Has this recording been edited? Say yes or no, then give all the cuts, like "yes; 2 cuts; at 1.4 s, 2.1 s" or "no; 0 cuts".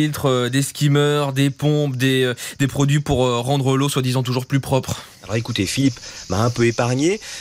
yes; 1 cut; at 5.2 s